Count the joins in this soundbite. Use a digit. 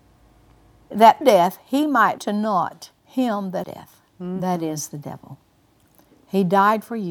5